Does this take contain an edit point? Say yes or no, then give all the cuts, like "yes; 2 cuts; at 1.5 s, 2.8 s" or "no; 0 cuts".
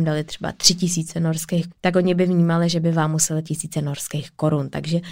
yes; 2 cuts; at 1.7 s, 3.4 s